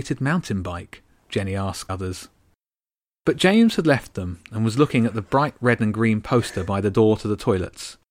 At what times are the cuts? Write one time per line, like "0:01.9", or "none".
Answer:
0:01.9